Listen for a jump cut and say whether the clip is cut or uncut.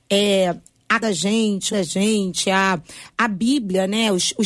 cut